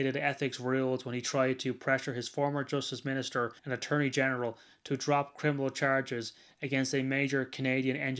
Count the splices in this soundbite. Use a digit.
1